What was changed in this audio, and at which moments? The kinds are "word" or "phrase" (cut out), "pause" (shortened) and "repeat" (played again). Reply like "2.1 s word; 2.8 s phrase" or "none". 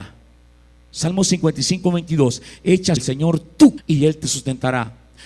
3.0 s word; 3.8 s word